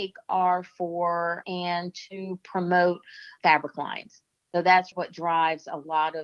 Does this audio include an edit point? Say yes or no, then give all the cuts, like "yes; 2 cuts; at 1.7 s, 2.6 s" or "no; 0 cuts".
yes; 4 cuts; at 1.4 s, 3.4 s, 4.3 s, 4.9 s